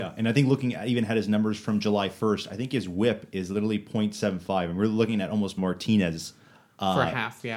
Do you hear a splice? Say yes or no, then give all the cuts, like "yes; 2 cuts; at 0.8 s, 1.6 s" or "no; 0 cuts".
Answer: yes; 1 cut; at 5.6 s